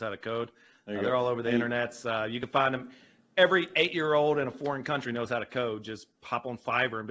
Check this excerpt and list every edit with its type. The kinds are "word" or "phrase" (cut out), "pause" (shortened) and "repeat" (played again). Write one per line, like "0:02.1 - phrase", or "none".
none